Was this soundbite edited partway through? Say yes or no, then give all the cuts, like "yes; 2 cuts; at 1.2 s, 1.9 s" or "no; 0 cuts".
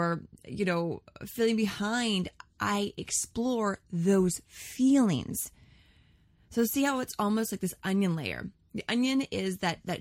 no; 0 cuts